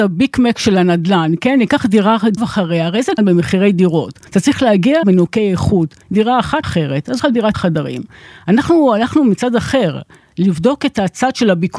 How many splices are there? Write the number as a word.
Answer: eight